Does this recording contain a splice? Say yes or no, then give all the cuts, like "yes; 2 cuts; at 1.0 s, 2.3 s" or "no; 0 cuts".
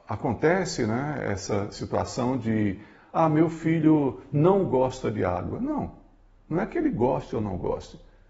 no; 0 cuts